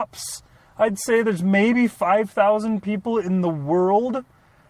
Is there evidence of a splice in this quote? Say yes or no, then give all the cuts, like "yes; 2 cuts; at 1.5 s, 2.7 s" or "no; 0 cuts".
no; 0 cuts